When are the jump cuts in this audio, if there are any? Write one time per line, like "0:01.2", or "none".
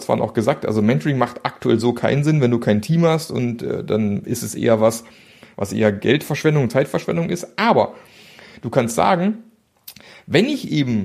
none